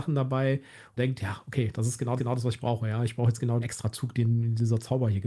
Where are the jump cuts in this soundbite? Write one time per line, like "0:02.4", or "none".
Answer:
0:01.0
0:02.2
0:03.6